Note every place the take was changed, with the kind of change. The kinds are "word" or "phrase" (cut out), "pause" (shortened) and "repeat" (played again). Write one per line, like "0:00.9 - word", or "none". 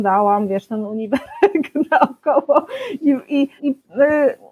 0:03.6 - pause